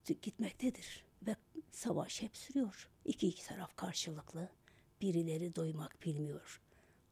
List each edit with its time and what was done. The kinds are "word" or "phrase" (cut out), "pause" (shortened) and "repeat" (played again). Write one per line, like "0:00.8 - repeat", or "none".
0:01.1 - pause
0:03.0 - pause

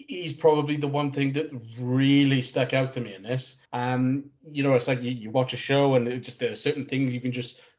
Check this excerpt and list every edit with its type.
0:03.6 - pause

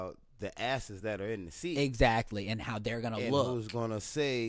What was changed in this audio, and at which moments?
none

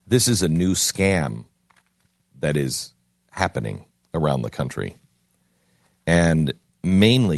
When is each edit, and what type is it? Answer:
0:03.9 - pause

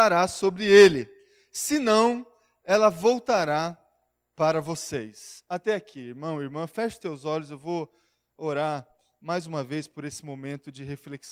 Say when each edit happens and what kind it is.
none

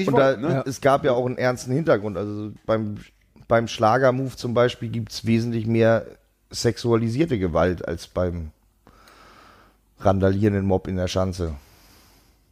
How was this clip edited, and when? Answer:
none

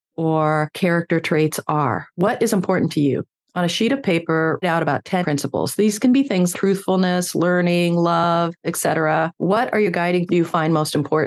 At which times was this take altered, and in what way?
0:04.6 - word
0:05.2 - word
0:06.5 - word
0:10.3 - word

